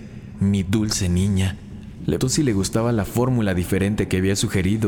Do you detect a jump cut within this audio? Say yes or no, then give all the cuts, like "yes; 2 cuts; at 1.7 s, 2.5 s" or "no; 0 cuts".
yes; 1 cut; at 2.2 s